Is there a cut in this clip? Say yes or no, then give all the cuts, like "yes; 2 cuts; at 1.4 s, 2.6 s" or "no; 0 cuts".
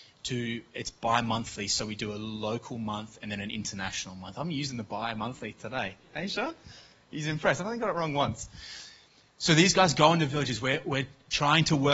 no; 0 cuts